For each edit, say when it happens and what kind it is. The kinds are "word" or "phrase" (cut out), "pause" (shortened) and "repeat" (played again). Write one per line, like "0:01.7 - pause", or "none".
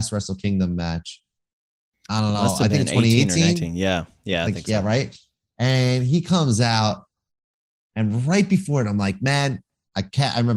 none